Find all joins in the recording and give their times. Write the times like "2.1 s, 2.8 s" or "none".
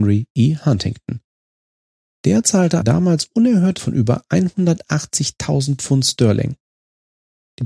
2.8 s, 3.8 s